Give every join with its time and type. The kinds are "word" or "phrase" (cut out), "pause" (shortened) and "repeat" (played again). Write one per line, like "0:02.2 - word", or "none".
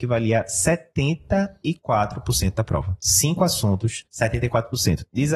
0:04.1 - pause